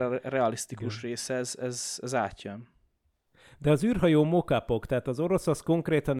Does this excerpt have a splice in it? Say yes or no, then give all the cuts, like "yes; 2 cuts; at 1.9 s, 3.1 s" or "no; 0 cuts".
no; 0 cuts